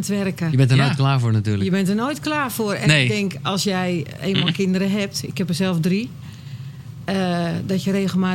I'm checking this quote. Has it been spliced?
no; 0 cuts

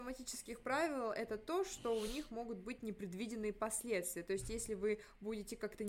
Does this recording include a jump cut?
no; 0 cuts

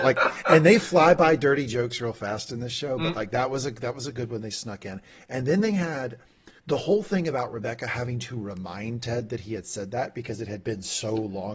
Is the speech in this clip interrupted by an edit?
yes; 1 cut; at 6.6 s

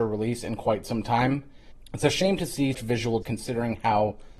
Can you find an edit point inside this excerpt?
yes; 2 cuts; at 2.7 s, 3.2 s

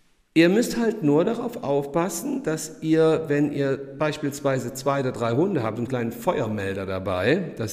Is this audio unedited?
no; 1 cut; at 5.9 s

